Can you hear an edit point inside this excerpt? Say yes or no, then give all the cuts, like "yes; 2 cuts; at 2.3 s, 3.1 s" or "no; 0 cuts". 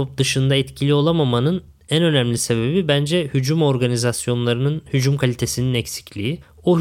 no; 0 cuts